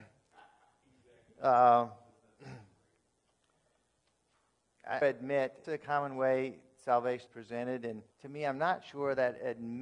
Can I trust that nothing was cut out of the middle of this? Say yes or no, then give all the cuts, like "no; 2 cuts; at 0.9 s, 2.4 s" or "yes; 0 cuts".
no; 4 cuts; at 5.0 s, 5.6 s, 7.3 s, 8.1 s